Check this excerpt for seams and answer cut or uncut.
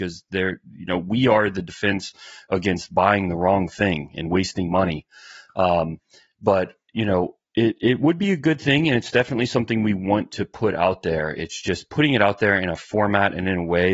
uncut